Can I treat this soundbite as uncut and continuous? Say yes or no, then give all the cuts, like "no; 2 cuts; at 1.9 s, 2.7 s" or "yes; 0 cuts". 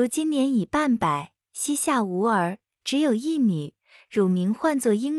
yes; 0 cuts